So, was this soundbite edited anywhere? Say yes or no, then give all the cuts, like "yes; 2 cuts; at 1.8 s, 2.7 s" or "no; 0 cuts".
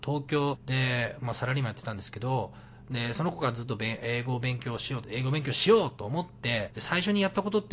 yes; 1 cut; at 5.0 s